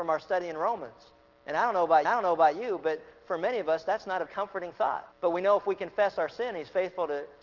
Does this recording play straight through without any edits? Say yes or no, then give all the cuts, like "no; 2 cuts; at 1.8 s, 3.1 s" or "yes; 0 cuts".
no; 4 cuts; at 1.3 s, 2.0 s, 4.3 s, 5.1 s